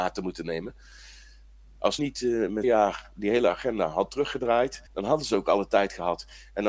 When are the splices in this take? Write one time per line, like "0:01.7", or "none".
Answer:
0:02.0
0:02.6
0:04.9